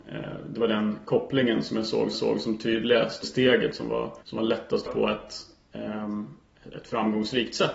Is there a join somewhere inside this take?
yes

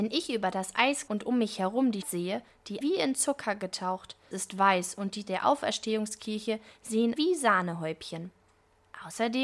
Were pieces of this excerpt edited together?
yes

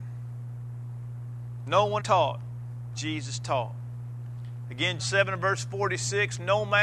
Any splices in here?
yes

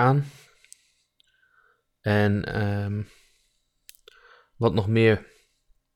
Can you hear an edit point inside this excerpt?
no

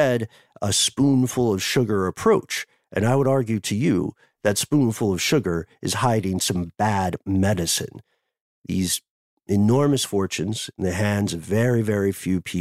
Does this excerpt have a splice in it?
no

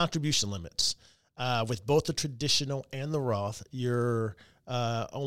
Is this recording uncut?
yes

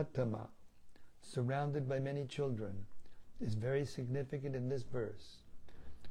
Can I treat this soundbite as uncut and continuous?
yes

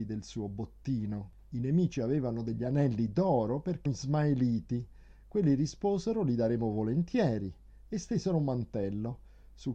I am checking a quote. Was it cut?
yes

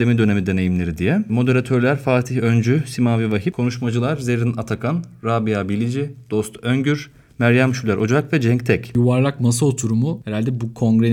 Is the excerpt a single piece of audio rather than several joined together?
yes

